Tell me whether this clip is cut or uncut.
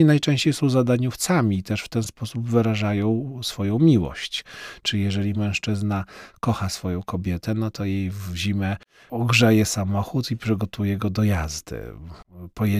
uncut